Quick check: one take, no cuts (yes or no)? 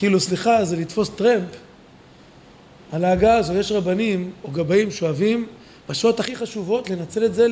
yes